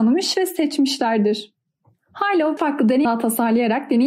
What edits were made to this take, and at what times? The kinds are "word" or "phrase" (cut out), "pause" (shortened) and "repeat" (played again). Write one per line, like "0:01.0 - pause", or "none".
0:02.6 - word
0:03.0 - word